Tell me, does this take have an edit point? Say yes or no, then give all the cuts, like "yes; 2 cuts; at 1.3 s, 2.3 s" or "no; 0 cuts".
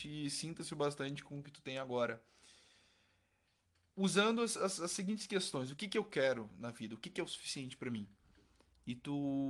no; 0 cuts